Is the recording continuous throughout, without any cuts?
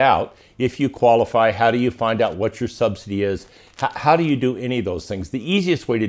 yes; 0 cuts

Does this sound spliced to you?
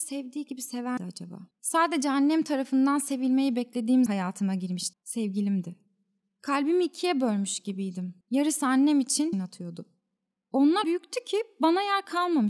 yes; 7 cuts; at 1.0 s, 1.5 s, 4.1 s, 4.9 s, 8.2 s, 9.3 s, 10.8 s

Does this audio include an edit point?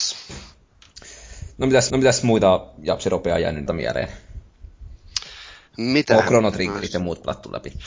yes; 2 cuts; at 1.9 s, 3.7 s

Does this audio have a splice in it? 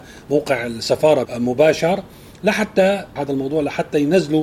yes; 2 cuts; at 1.2 s, 3.2 s

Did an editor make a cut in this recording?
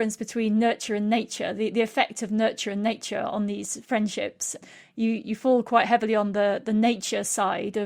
no; 0 cuts

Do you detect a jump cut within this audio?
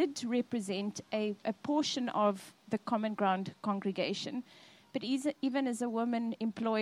no; 0 cuts

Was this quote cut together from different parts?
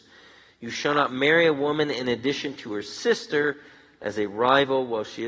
no; 0 cuts

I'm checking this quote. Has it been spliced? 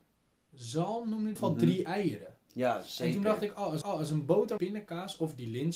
yes; 3 cuts; at 1.4 s, 3.8 s, 4.6 s

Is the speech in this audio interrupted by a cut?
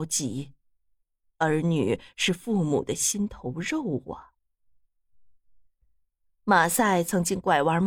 no; 0 cuts

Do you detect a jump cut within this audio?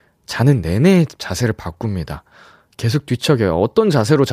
no; 0 cuts

